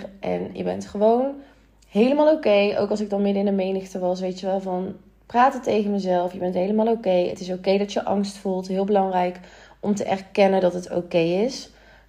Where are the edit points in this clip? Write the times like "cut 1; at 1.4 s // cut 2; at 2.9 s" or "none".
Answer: none